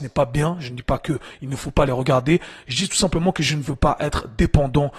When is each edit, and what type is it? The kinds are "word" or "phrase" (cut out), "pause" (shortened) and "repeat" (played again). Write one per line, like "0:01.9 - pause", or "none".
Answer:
none